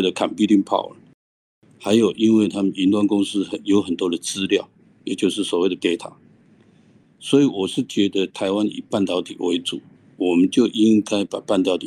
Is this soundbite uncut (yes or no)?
no